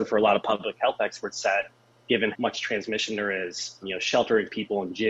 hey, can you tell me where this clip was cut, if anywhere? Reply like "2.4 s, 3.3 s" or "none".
2.3 s, 3.8 s